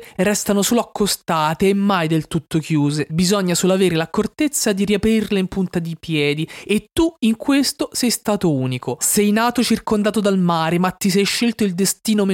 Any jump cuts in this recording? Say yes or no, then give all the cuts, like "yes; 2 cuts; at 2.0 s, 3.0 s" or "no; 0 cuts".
no; 0 cuts